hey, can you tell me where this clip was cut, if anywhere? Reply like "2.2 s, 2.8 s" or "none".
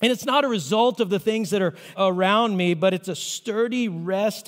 1.9 s